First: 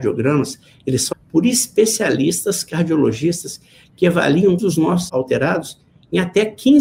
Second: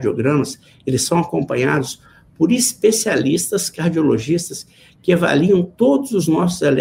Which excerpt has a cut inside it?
first; 3 cuts; at 1.1 s, 4.6 s, 5.1 s

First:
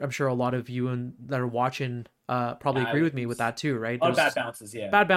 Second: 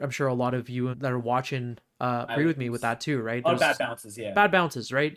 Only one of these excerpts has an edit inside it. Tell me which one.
second; 2 cuts; at 0.9 s, 2.3 s

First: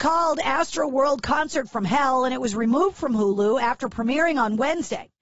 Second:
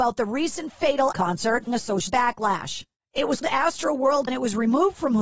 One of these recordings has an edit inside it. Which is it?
second; 5 cuts; at 1.1 s, 1.7 s, 2.1 s, 3.4 s, 4.3 s

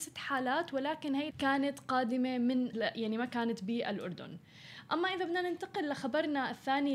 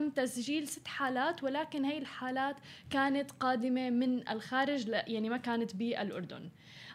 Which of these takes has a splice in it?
first; 2 cuts; at 1.3 s, 2.7 s

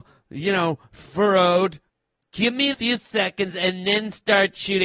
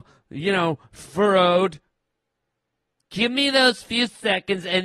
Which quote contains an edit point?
first; 2 cuts; at 1.9 s, 2.7 s

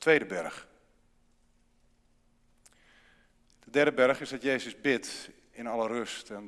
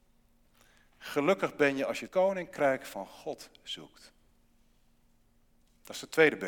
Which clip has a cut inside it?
second; 1 cut; at 2.1 s

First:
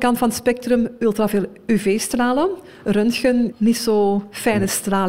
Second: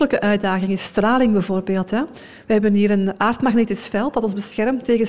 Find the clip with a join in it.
first; 1 cut; at 3.5 s

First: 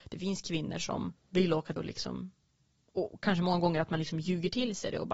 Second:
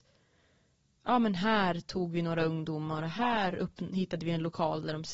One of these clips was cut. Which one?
first; 2 cuts; at 1.2 s, 1.8 s

